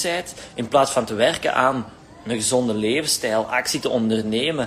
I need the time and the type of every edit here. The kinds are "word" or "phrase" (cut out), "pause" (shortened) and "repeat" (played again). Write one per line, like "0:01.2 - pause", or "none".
none